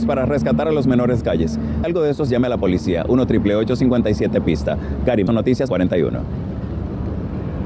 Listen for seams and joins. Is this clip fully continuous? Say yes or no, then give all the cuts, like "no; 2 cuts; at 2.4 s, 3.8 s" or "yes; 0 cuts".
no; 5 cuts; at 1.2 s, 1.8 s, 2.3 s, 5.3 s, 5.7 s